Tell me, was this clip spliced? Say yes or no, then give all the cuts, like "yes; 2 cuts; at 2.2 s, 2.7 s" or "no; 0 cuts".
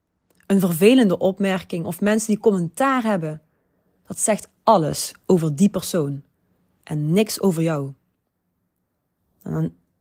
no; 0 cuts